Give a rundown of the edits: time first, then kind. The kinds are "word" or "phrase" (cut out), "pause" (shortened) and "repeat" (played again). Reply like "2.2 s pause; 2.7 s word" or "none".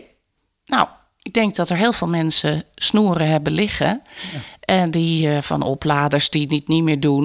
none